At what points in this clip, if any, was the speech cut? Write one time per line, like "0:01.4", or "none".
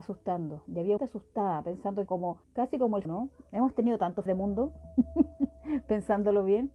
0:01.0
0:02.1
0:02.4
0:03.0
0:04.3